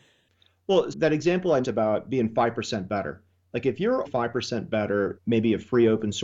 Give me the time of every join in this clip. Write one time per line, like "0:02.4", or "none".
0:00.9
0:01.6
0:04.0
0:05.2